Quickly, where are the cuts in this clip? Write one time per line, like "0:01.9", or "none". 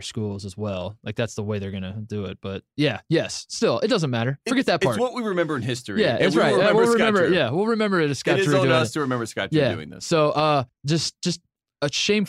0:10.7